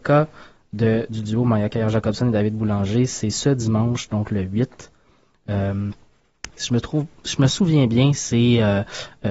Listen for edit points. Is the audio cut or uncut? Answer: uncut